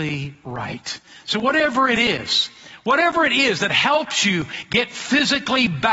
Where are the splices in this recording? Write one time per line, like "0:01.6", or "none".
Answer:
none